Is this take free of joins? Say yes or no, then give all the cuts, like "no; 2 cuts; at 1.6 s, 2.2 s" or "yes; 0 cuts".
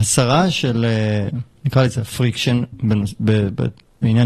yes; 0 cuts